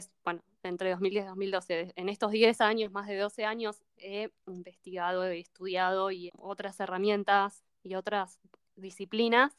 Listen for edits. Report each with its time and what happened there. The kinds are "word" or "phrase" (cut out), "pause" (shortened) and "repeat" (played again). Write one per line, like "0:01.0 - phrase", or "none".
0:06.3 - phrase